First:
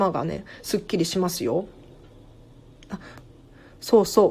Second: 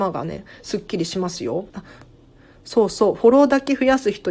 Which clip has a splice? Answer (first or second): second